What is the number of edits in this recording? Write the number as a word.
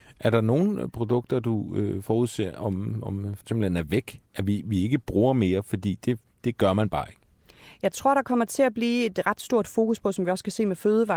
one